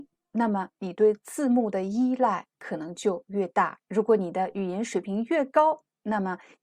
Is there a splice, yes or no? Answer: yes